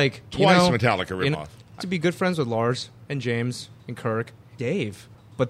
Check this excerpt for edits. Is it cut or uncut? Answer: cut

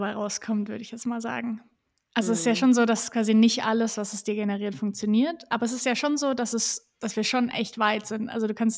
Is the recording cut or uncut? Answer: uncut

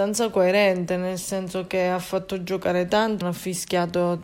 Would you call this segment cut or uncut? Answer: cut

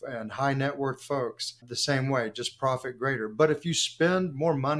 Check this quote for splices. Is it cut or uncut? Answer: cut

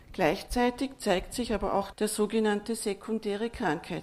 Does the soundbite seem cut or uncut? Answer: cut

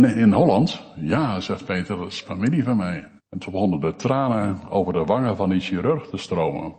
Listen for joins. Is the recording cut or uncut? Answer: cut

